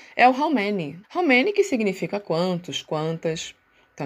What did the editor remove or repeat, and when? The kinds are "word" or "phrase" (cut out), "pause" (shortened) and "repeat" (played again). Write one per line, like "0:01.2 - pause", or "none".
0:01.0 - pause